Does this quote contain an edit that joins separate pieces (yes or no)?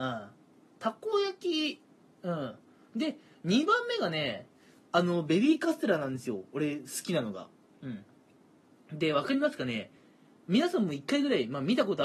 no